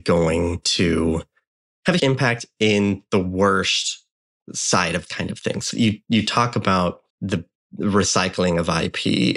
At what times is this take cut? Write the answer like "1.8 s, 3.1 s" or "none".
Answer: 2.0 s, 5.1 s, 5.7 s, 7.1 s